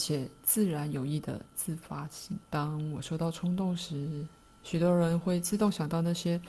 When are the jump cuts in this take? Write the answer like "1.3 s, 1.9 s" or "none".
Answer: 2.4 s